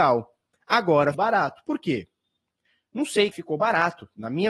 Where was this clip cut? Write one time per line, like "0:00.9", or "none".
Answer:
0:01.1
0:03.3